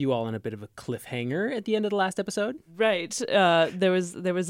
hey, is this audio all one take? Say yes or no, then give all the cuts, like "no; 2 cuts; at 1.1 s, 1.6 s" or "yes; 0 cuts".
yes; 0 cuts